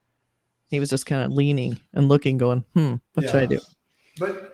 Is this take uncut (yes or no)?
no